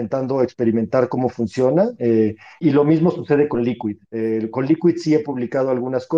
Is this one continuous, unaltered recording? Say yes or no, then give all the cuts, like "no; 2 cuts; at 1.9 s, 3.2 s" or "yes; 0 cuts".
no; 1 cut; at 2.6 s